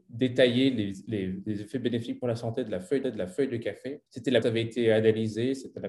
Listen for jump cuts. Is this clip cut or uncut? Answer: cut